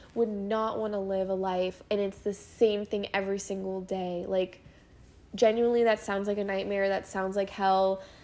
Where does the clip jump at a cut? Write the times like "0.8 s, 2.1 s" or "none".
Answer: none

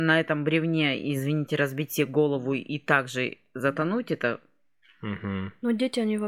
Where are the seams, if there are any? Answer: none

